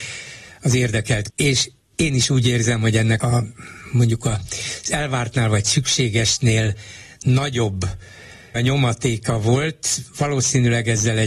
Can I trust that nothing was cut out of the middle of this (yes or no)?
no